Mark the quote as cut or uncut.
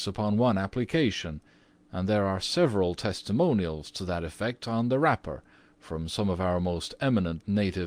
uncut